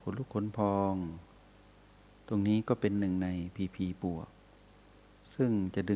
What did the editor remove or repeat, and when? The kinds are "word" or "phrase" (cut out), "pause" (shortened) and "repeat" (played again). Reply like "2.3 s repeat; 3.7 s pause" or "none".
none